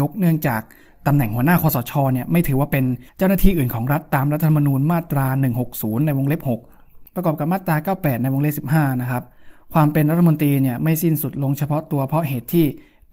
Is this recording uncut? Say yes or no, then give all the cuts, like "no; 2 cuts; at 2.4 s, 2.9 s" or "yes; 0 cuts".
no; 1 cut; at 3.1 s